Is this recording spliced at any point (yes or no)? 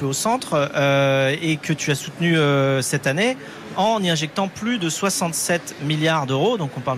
no